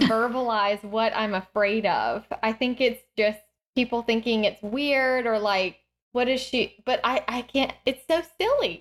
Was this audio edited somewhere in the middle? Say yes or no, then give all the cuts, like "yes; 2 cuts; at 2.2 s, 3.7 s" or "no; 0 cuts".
no; 0 cuts